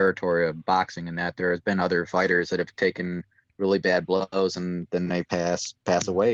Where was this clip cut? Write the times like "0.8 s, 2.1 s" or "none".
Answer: none